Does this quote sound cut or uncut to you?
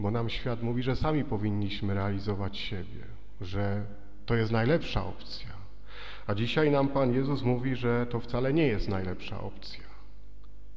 uncut